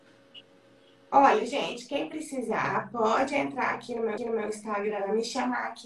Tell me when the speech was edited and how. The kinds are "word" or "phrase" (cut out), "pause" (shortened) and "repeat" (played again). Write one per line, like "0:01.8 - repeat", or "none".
0:04.2 - repeat